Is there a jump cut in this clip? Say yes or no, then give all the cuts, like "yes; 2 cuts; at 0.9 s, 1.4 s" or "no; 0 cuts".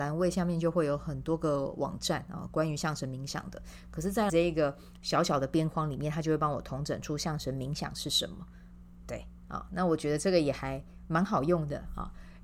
yes; 1 cut; at 4.3 s